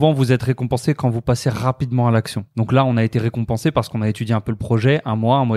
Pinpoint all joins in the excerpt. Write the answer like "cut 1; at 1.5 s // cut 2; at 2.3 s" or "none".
cut 1; at 2.5 s